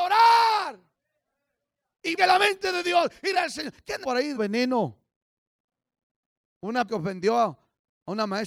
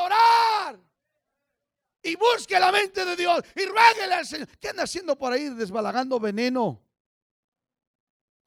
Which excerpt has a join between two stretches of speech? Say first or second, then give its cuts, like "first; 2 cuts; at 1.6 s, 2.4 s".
first; 5 cuts; at 2.2 s, 3.3 s, 4.0 s, 4.4 s, 6.9 s